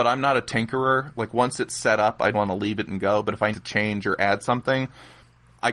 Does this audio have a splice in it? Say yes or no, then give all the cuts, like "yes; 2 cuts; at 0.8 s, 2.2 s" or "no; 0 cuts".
yes; 2 cuts; at 2.3 s, 3.5 s